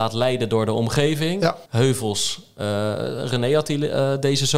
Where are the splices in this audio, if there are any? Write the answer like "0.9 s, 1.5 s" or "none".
1.7 s

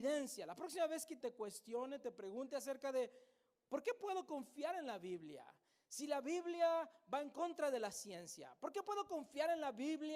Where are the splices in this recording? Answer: 1.2 s

